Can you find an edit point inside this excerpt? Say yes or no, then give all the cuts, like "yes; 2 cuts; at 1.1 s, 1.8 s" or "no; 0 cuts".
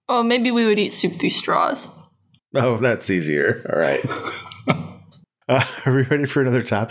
no; 0 cuts